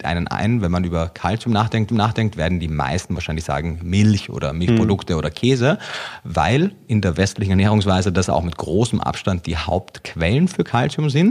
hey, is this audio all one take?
no; 1 cut; at 1.9 s

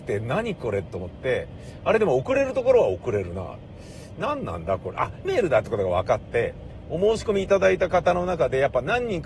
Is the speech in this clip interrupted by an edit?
yes; 1 cut; at 5.2 s

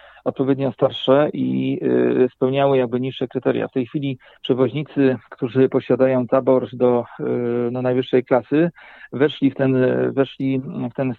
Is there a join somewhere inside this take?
no; 0 cuts

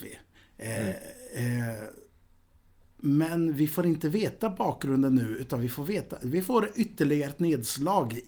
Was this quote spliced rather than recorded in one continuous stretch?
no; 0 cuts

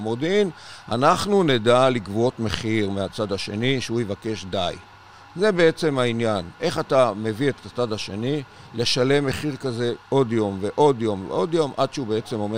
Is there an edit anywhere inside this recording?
no; 0 cuts

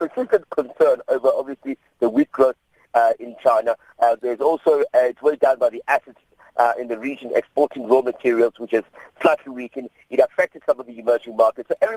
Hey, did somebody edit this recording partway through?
no; 0 cuts

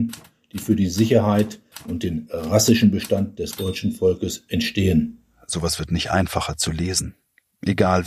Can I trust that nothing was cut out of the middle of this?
yes; 0 cuts

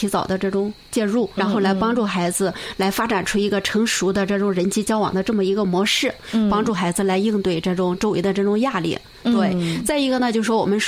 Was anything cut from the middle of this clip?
yes; 1 cut; at 1.4 s

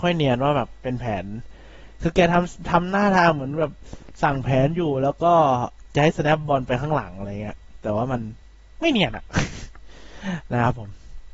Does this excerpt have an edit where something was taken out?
no; 0 cuts

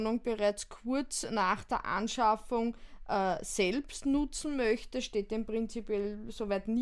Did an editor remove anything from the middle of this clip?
no; 0 cuts

